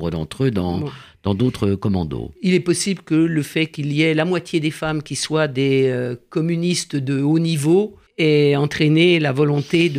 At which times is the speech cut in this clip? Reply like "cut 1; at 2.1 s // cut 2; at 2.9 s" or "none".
cut 1; at 8.1 s